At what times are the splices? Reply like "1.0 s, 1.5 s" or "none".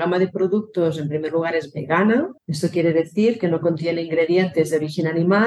2.4 s

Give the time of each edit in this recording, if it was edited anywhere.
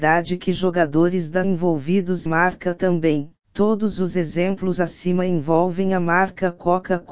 1.4 s, 2.3 s, 3.4 s, 4.8 s

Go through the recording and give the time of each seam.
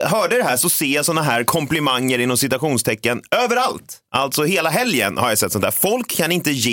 4.1 s

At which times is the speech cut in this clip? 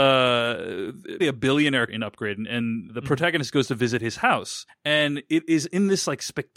1.2 s, 1.9 s, 2.9 s, 4.7 s

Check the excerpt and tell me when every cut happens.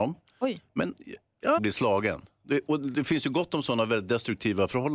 1.6 s

